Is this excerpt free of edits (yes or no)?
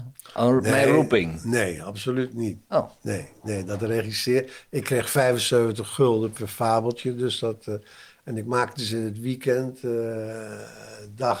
yes